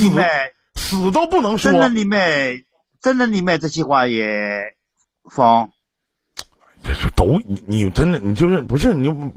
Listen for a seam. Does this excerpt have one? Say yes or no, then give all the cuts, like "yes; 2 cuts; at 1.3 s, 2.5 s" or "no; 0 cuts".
no; 0 cuts